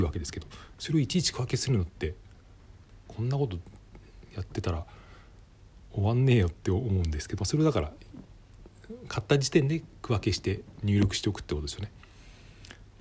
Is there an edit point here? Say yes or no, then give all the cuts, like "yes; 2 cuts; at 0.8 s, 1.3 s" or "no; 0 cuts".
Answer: yes; 1 cut; at 7.4 s